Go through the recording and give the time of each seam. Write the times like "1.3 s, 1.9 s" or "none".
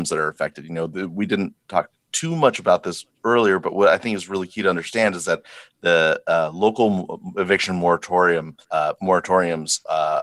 8.6 s